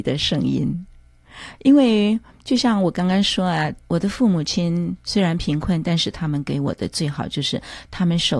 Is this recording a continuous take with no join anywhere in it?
no; 1 cut; at 3.8 s

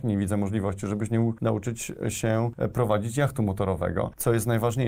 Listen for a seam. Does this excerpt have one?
no; 0 cuts

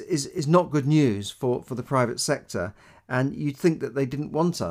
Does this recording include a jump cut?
no; 0 cuts

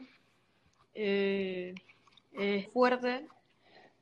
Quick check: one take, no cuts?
no; 1 cut; at 2.7 s

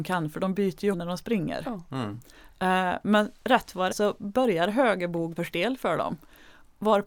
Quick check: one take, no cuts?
no; 3 cuts; at 0.9 s, 3.9 s, 5.4 s

